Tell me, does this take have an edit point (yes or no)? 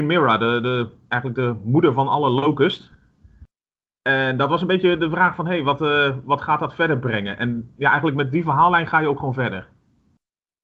no